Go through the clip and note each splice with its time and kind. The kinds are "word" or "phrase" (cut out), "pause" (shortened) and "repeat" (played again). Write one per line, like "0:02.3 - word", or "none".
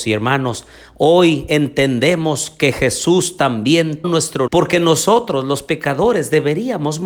0:04.0 - word
0:04.5 - word